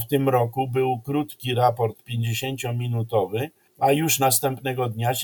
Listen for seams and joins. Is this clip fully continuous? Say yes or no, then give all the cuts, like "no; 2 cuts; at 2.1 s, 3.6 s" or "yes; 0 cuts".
no; 1 cut; at 3.7 s